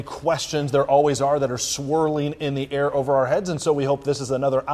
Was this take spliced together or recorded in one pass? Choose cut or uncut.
uncut